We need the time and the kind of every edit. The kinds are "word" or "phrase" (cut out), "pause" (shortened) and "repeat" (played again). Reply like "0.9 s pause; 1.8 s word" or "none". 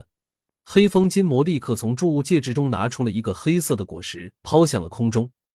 4.4 s pause